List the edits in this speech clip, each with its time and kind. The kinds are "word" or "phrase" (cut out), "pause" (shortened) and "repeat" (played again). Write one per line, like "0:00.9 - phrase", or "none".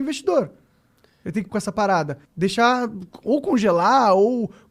0:01.5 - word
0:02.2 - pause